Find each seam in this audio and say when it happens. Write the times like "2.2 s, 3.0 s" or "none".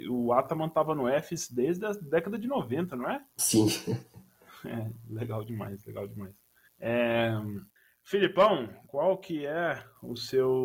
3.3 s, 6.6 s